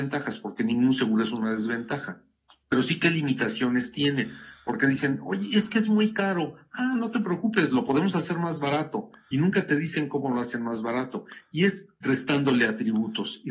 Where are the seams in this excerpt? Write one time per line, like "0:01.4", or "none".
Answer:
none